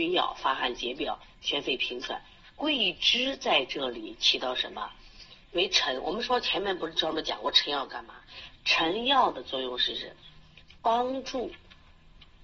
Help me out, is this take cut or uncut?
cut